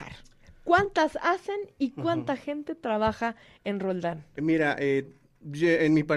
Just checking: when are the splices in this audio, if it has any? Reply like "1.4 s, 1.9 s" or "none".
none